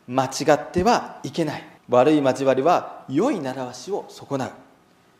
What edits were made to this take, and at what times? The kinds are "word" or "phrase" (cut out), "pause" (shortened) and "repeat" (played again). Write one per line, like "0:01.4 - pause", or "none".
0:01.8 - pause